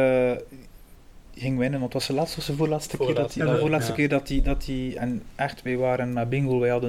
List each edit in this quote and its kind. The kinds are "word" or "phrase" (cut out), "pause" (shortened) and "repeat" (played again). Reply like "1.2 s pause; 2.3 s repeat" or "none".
none